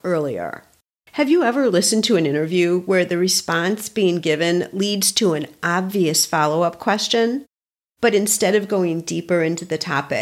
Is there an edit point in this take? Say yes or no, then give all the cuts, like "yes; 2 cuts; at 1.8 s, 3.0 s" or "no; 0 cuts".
yes; 1 cut; at 1.0 s